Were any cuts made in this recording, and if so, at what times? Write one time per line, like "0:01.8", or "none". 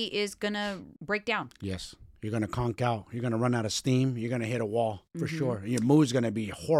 0:01.0